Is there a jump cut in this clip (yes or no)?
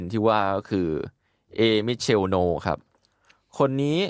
no